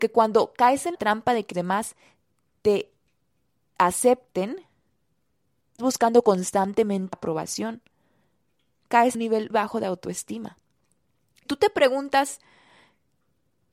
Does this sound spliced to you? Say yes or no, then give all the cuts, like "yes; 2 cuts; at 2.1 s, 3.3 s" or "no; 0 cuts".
yes; 7 cuts; at 0.9 s, 1.5 s, 5.8 s, 7.1 s, 9.1 s, 9.5 s, 11.5 s